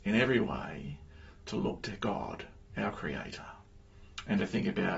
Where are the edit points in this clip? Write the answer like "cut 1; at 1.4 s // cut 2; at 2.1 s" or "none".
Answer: none